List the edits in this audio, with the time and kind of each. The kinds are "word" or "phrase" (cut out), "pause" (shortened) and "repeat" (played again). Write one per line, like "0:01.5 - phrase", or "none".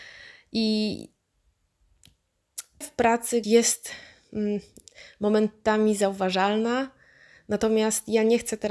0:02.8 - word
0:03.4 - word